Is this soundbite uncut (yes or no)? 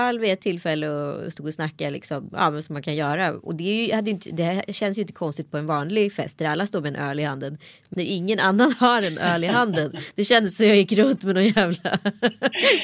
no